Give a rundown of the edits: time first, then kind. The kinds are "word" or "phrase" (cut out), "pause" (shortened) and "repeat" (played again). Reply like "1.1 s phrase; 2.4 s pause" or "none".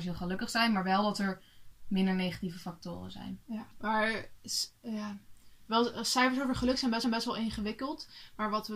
3.7 s pause; 7.0 s repeat